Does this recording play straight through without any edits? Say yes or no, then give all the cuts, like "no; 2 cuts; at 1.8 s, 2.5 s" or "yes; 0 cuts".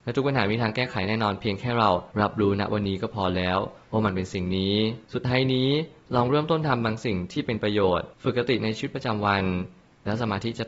no; 3 cuts; at 2.1 s, 5.0 s, 8.1 s